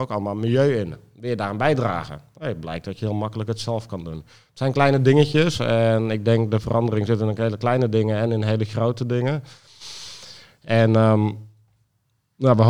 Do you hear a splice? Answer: no; 0 cuts

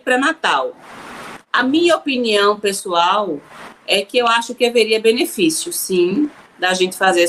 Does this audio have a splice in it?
no; 0 cuts

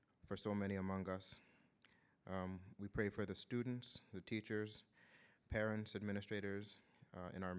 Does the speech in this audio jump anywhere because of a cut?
no; 0 cuts

